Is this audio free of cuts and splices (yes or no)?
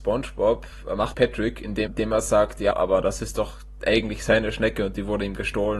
no